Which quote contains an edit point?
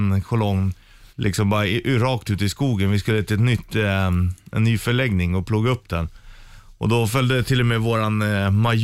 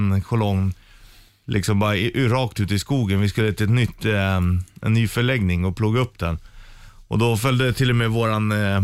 first; 1 cut; at 1.1 s

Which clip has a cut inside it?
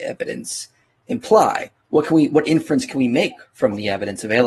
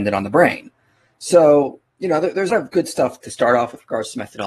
second; 1 cut; at 2.5 s

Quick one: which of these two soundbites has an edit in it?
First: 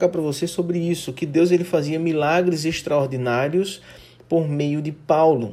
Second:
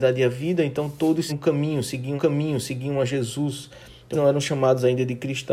second; 3 cuts; at 1.3 s, 2.2 s, 4.1 s

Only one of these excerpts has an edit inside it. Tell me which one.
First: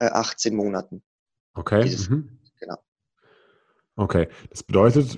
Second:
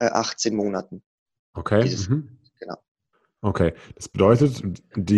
second; 1 cut; at 3.1 s

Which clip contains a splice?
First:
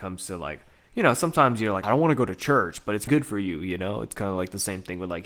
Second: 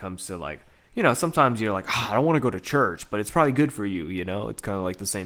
first; 2 cuts; at 1.8 s, 3.1 s

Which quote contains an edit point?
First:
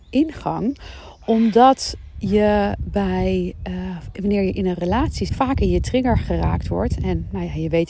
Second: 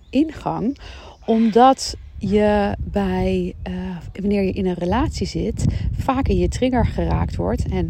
first; 1 cut; at 5.3 s

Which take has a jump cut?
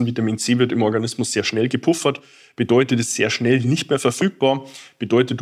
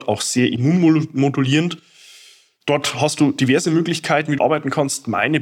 second; 1 cut; at 4.4 s

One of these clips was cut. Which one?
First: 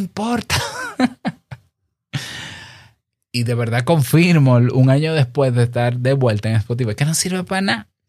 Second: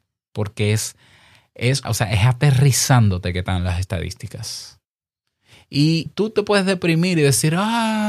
second; 2 cuts; at 1.8 s, 6.1 s

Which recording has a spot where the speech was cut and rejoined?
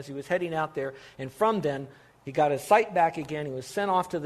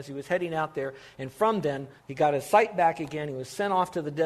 second; 1 cut; at 2.0 s

